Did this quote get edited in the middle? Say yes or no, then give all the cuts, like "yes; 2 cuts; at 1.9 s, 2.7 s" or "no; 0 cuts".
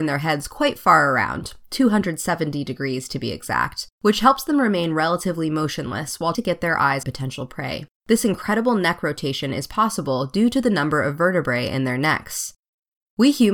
yes; 4 cuts; at 3.9 s, 6.3 s, 7.0 s, 8.0 s